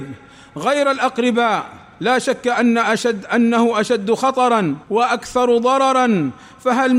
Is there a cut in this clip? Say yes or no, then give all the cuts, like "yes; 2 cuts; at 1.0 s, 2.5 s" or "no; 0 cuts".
yes; 2 cuts; at 1.9 s, 4.8 s